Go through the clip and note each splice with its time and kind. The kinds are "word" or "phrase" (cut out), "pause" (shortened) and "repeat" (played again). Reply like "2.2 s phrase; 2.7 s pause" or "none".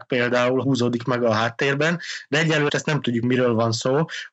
2.7 s word; 3.2 s word